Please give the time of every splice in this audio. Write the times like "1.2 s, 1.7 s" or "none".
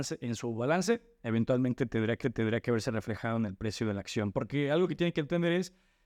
2.2 s